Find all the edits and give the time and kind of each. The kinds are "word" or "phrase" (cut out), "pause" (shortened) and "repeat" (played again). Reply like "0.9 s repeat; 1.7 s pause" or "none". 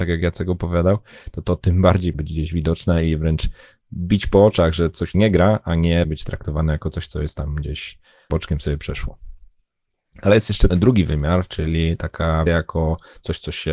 2.1 s word; 5.1 s word; 6.0 s word; 8.3 s word; 10.7 s word; 12.5 s word